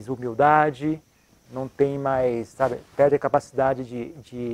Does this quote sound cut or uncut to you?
uncut